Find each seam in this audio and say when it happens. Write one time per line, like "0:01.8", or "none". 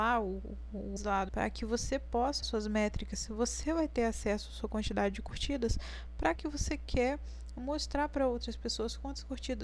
0:01.0
0:01.3
0:02.4
0:06.4